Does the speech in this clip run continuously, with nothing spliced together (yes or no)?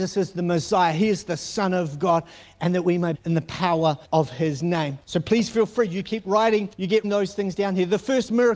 no